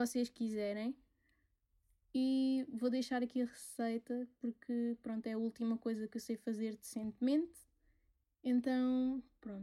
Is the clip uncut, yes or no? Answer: yes